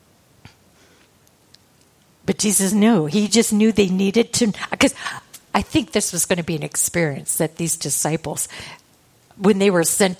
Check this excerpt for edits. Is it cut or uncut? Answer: uncut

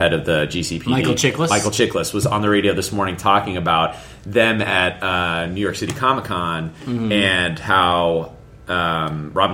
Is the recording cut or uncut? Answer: uncut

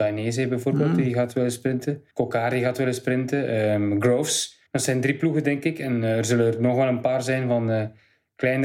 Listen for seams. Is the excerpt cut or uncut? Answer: cut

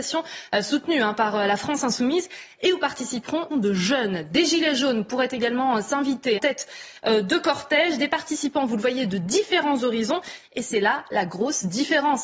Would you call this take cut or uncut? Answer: cut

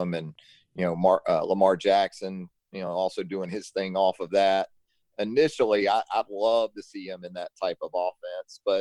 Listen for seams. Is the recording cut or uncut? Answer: uncut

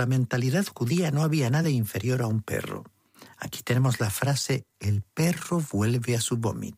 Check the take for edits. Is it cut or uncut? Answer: uncut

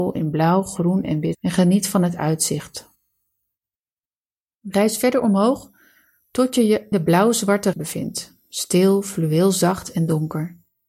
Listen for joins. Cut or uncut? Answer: cut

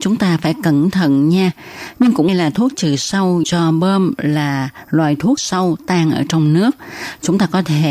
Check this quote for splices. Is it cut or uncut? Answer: cut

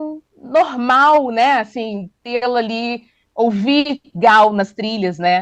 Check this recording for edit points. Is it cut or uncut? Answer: uncut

